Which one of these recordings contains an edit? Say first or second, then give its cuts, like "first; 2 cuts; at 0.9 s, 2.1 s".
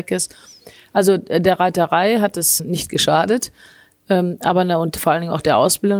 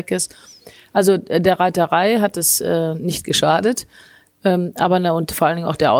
first; 1 cut; at 2.6 s